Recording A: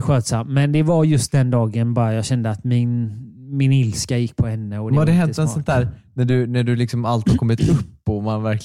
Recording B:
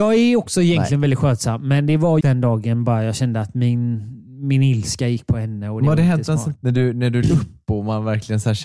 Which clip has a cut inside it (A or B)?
B